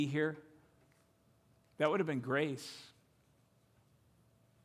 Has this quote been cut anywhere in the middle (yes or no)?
no